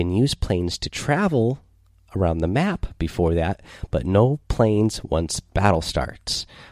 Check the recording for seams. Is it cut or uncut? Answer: uncut